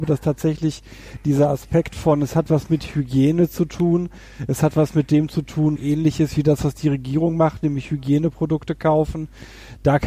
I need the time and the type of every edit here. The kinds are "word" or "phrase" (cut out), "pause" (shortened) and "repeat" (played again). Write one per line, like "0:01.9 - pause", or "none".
0:05.8 - phrase